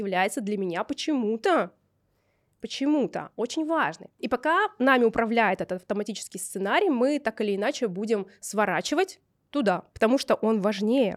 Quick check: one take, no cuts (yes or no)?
yes